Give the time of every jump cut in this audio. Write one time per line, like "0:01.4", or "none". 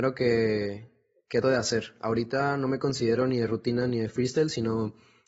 0:01.4